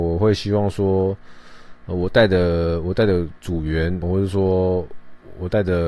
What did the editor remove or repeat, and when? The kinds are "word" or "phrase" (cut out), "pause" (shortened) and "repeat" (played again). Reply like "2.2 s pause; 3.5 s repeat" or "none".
4.0 s word